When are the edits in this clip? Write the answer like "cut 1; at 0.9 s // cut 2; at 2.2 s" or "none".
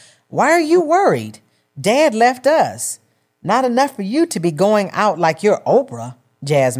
none